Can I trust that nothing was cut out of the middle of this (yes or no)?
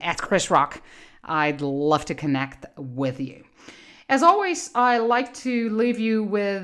yes